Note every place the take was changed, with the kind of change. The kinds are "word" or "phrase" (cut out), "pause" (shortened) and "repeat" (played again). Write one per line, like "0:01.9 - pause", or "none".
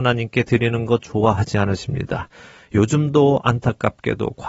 none

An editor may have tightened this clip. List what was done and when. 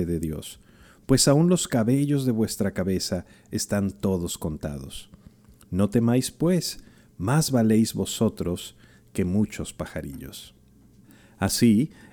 none

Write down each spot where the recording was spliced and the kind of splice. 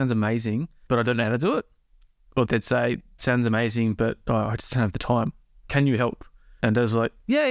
0:03.2 - word

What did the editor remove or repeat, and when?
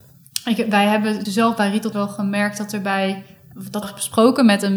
0:01.3 - word
0:01.9 - word
0:03.8 - phrase

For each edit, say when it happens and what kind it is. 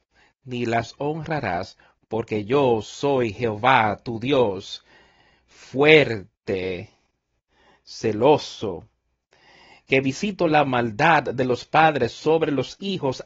none

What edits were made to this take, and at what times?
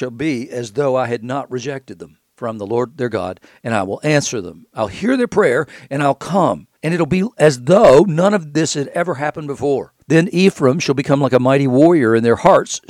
0:02.3 - pause
0:06.8 - pause
0:10.0 - pause

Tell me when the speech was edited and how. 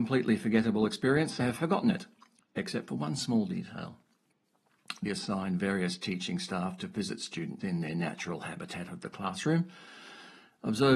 0:01.4 - word
0:05.1 - word
0:07.6 - word

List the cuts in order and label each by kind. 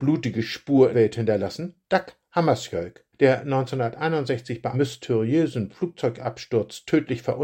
0:00.9 - word
0:01.8 - pause
0:03.1 - pause
0:04.7 - word

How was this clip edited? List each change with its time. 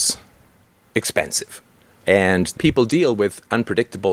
0:02.6 - phrase

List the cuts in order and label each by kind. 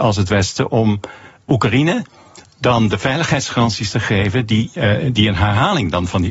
none

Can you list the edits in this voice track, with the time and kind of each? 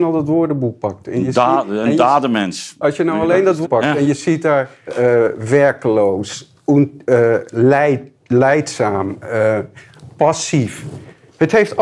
0:03.6 - word
0:04.9 - word
0:08.1 - pause

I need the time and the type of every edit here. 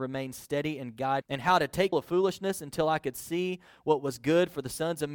0:01.2 - phrase
0:01.9 - word

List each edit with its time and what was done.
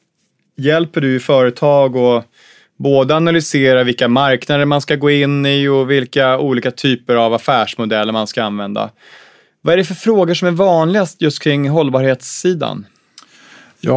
none

